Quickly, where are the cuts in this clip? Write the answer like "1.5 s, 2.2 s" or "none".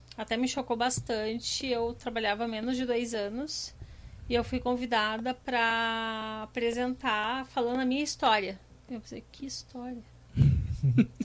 8.7 s